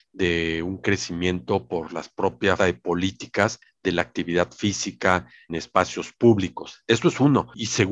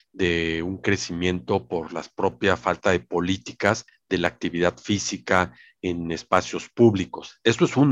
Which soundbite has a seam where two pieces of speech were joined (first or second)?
first